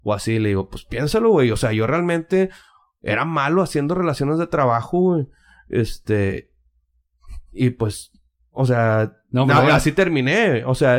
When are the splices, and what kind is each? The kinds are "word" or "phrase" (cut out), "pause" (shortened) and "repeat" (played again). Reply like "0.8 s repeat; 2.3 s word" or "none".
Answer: none